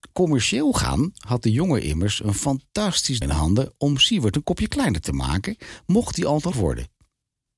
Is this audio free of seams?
no; 2 cuts; at 3.2 s, 6.5 s

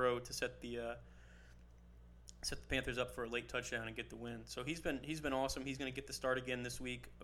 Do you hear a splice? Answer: no; 0 cuts

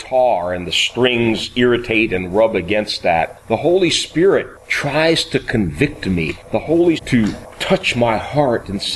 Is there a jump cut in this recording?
yes; 1 cut; at 7.0 s

